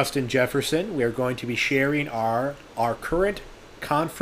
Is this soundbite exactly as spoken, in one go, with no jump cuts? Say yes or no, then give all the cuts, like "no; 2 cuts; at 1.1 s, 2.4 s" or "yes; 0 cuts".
yes; 0 cuts